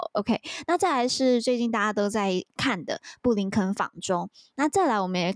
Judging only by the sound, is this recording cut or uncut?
uncut